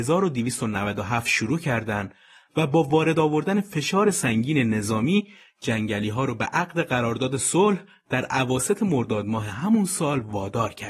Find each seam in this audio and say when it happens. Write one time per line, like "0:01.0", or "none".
none